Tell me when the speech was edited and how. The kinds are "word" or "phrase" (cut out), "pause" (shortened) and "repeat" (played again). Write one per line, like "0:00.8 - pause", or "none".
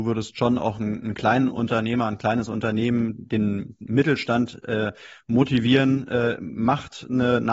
none

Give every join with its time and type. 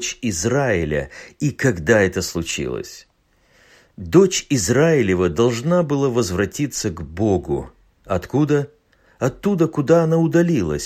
none

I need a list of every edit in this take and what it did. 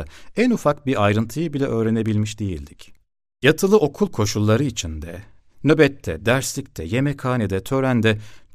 none

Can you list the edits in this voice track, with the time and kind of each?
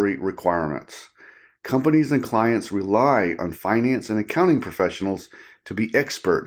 none

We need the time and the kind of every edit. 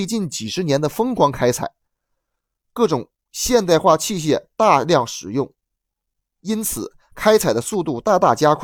none

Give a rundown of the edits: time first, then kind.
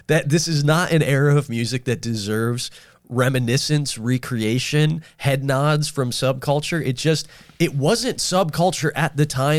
none

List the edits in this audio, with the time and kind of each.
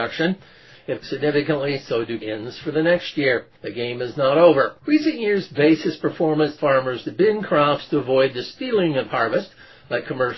0:01.0 - phrase
0:02.2 - word
0:03.5 - pause
0:04.8 - pause
0:06.6 - word
0:09.1 - phrase

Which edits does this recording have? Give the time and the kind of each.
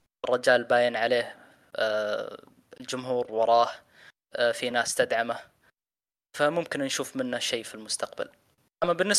none

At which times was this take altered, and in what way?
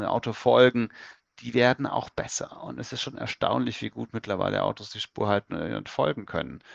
none

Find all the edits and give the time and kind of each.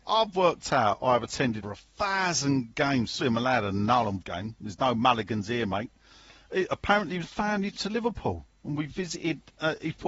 0:01.6 - word
0:03.2 - word
0:04.2 - word
0:07.2 - word
0:07.7 - word

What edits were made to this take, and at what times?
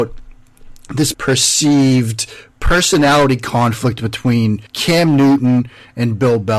0:01.1 - word
0:04.7 - pause

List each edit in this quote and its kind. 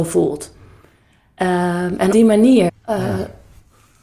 0:02.1 - word
0:02.7 - word

